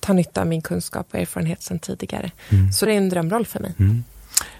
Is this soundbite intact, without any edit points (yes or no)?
no